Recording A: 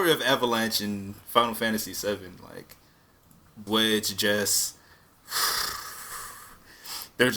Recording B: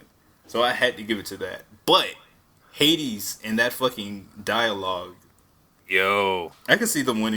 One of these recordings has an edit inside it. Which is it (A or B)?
A